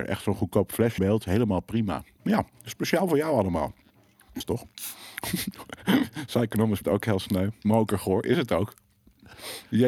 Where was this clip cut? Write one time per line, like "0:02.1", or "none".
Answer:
0:01.0
0:04.4
0:06.8